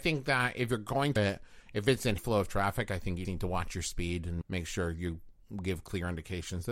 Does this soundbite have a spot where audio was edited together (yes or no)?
yes